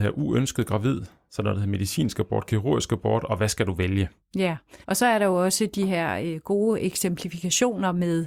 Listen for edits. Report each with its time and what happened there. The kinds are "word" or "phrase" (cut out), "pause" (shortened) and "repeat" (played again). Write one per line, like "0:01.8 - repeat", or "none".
0:04.8 - pause